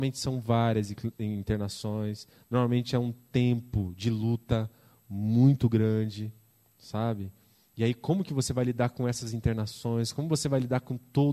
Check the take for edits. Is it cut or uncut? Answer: uncut